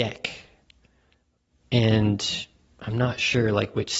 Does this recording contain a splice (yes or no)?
no